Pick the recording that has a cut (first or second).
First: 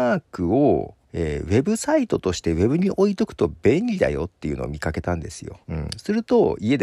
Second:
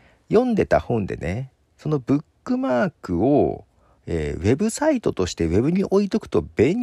first